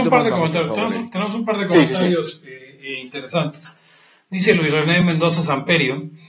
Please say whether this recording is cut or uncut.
uncut